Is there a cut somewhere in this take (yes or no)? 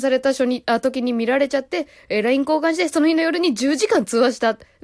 no